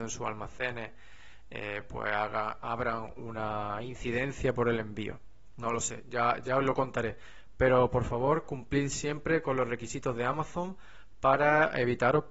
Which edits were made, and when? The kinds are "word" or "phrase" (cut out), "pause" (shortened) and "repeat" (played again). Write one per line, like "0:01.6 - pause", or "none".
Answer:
none